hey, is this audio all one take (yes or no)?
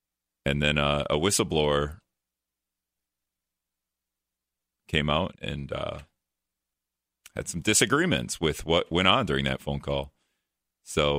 no